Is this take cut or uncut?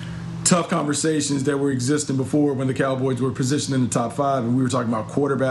uncut